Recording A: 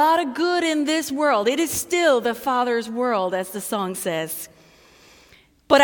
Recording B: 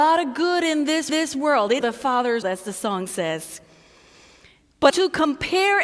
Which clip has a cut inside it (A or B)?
B